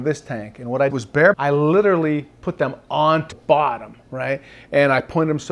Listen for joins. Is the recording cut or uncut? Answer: cut